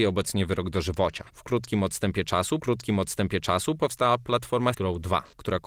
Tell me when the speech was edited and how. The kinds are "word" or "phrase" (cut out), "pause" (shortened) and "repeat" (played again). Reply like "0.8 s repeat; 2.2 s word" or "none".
1.3 s pause; 2.6 s repeat; 4.7 s word